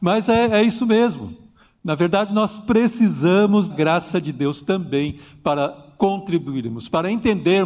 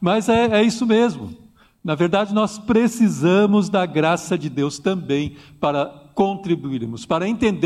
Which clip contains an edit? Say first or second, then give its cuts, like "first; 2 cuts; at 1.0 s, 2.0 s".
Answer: first; 1 cut; at 3.7 s